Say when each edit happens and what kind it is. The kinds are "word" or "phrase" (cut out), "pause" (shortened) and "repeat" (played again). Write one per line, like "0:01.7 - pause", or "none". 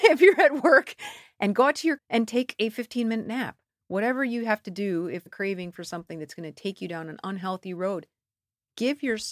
0:02.0 - word
0:05.3 - phrase